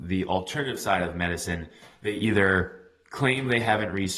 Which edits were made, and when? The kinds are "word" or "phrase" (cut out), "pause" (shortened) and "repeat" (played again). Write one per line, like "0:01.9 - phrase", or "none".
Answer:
none